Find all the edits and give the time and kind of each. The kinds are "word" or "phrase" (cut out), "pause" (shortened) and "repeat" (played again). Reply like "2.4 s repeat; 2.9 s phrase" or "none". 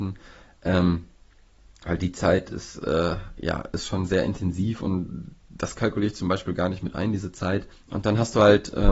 7.7 s pause